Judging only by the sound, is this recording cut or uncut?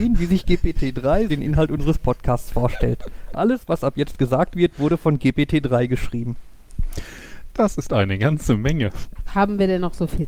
cut